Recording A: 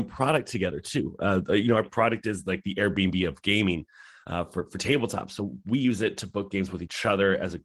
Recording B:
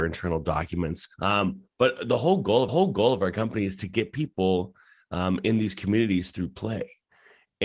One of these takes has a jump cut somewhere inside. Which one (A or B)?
B